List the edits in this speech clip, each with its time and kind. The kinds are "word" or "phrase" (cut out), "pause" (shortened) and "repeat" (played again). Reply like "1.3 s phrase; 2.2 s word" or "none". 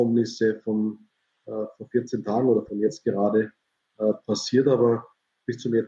none